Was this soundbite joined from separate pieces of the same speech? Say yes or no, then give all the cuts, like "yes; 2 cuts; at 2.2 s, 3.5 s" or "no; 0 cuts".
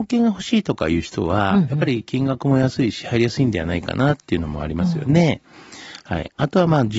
no; 0 cuts